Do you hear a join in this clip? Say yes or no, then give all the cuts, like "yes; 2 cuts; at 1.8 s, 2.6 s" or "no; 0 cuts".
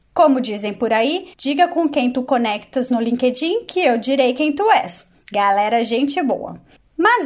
yes; 1 cut; at 1.3 s